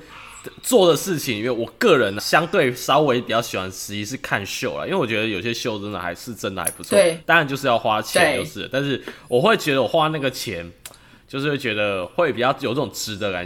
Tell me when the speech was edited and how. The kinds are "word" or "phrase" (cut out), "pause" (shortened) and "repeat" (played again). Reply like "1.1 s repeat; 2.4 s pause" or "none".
2.2 s word